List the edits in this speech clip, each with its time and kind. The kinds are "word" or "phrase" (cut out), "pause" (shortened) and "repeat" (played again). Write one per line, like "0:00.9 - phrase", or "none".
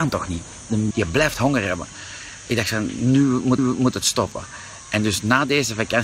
0:00.9 - word
0:03.6 - repeat